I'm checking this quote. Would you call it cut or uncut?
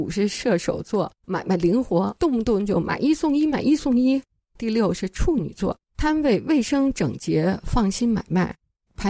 cut